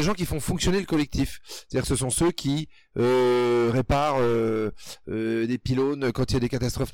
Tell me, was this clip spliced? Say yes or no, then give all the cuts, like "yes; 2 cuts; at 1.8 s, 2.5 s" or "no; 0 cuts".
no; 0 cuts